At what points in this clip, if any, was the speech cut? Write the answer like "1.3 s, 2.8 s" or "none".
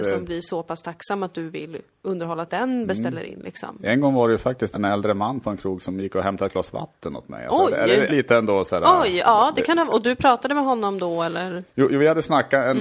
2.5 s, 4.7 s, 8.1 s, 11.7 s